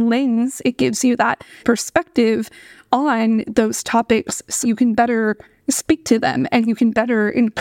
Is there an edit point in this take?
yes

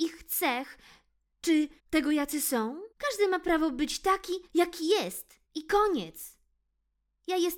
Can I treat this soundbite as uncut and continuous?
no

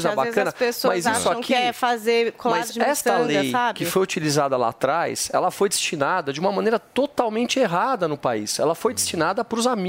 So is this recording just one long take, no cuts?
yes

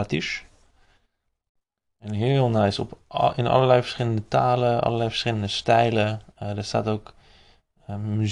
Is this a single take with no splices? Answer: yes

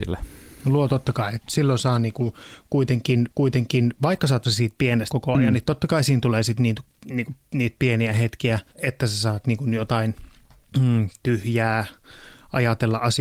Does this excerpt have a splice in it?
yes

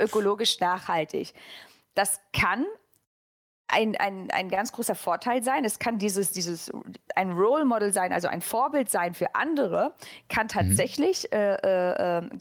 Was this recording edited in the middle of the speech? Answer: no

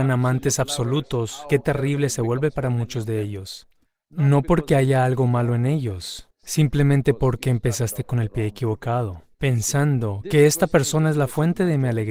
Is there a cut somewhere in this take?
no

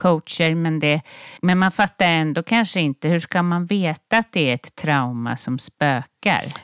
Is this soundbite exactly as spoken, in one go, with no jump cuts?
no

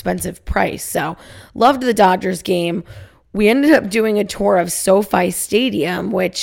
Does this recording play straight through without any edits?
yes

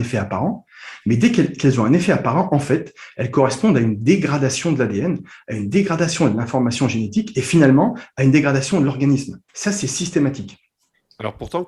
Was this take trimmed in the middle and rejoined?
yes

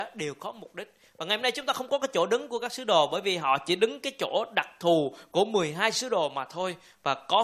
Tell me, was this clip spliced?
no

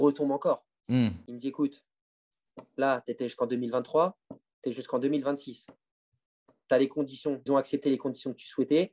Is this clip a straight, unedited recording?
no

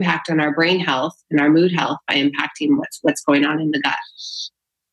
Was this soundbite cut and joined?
no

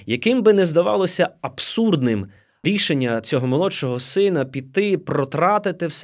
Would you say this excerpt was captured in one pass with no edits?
yes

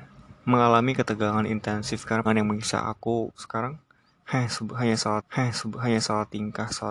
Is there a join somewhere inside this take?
yes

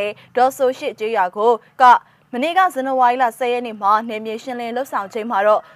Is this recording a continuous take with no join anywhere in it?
no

